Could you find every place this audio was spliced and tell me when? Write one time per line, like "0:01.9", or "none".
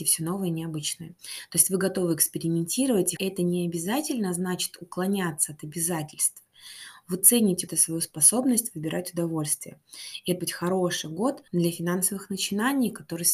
0:03.2
0:07.7
0:10.4
0:11.5